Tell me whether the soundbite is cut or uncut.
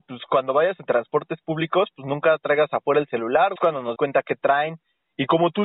cut